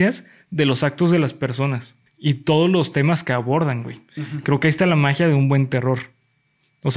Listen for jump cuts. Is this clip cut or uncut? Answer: cut